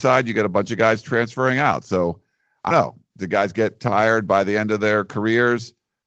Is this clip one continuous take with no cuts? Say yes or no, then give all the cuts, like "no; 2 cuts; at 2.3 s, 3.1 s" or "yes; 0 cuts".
no; 1 cut; at 2.7 s